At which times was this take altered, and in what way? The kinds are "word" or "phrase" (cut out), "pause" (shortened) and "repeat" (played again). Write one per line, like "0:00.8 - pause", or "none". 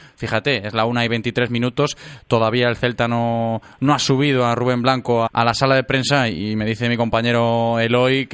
0:05.3 - word

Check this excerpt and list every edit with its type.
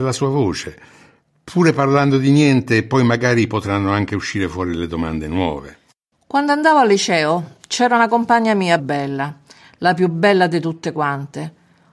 0:08.8 - word

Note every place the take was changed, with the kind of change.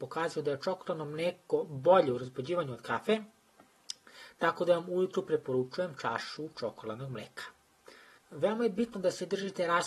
0:08.2 - pause

